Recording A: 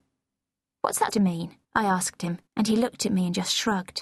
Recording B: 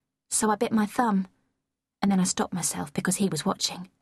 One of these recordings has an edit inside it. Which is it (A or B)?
A